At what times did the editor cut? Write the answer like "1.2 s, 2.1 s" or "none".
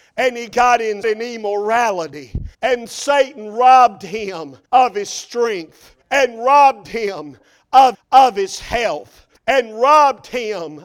1.0 s, 2.5 s, 4.7 s, 6.0 s, 7.9 s, 9.4 s